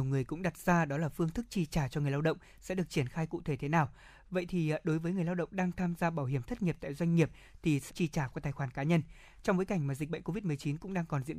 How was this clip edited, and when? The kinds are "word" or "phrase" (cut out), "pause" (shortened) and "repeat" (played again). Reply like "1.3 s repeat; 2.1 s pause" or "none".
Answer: 7.9 s word